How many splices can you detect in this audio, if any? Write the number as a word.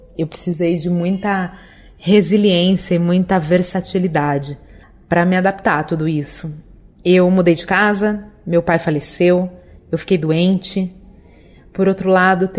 zero